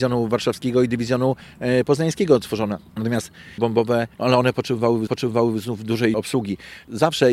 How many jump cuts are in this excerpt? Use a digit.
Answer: 4